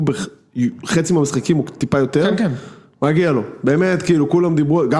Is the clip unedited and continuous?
yes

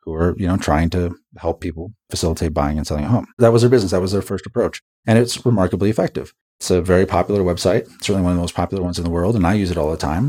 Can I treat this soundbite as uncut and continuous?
no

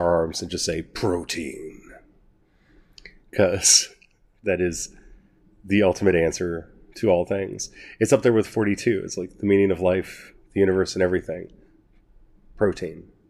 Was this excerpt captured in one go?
yes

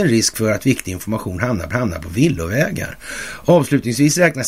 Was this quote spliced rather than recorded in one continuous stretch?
yes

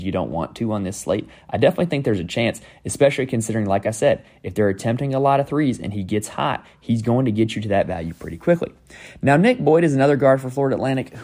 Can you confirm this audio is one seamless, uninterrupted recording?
yes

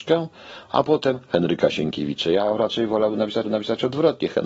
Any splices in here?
yes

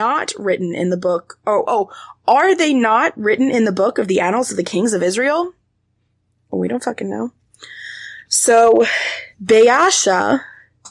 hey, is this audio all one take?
no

